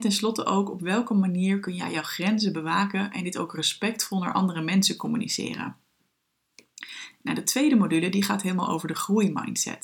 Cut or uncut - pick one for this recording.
uncut